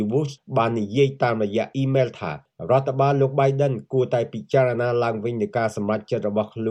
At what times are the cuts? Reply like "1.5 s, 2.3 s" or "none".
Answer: none